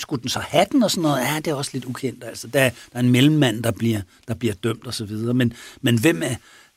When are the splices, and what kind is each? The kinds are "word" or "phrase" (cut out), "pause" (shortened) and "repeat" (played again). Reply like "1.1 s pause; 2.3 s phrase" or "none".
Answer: none